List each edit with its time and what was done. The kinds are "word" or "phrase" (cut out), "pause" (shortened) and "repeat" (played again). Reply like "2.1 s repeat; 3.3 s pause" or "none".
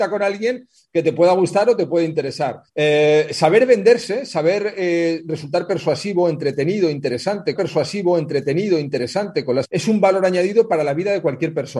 2.7 s pause; 7.5 s repeat; 9.6 s word